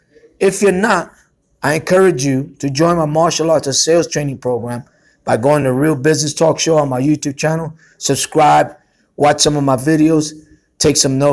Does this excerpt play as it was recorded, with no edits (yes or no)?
yes